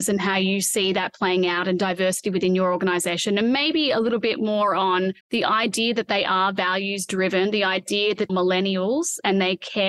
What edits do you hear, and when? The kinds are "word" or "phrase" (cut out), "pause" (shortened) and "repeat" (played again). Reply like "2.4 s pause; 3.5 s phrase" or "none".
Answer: 5.2 s pause; 8.3 s phrase